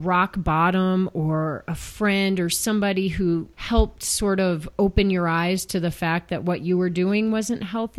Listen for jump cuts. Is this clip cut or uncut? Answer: cut